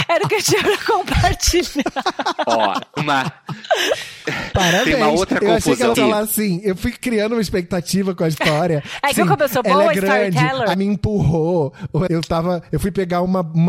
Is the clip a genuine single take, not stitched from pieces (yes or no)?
no